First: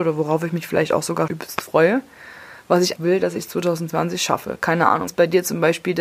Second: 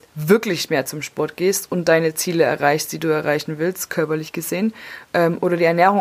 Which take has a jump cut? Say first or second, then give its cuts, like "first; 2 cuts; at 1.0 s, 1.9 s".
first; 3 cuts; at 1.3 s, 3.0 s, 5.1 s